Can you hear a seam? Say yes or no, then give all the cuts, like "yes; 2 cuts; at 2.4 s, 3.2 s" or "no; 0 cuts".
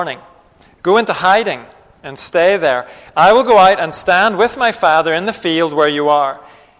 no; 0 cuts